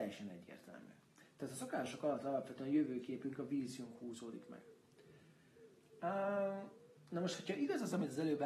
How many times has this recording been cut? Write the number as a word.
zero